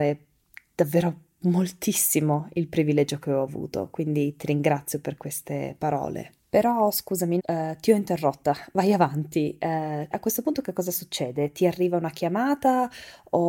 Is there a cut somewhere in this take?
yes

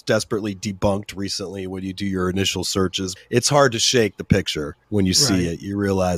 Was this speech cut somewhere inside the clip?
yes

